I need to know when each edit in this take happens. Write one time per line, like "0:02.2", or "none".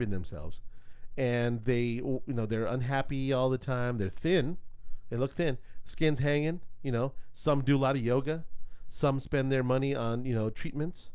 none